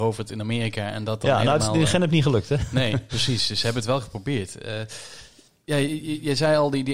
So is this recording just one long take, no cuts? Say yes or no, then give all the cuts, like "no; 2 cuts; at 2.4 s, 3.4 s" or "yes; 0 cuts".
yes; 0 cuts